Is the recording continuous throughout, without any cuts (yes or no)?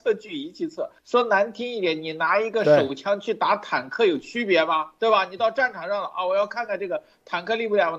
no